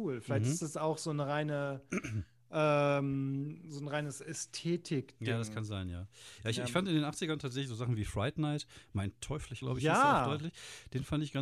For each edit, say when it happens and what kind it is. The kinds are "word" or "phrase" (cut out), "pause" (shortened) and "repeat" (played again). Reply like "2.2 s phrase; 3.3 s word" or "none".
9.6 s word